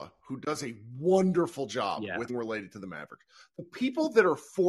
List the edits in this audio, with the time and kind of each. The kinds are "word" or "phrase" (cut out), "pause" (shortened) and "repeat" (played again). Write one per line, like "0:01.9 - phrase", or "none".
0:02.3 - word